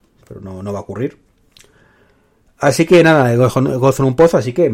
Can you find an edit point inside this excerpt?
no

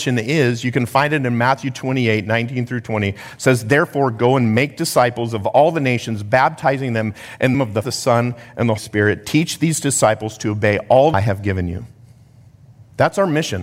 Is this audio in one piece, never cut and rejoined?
no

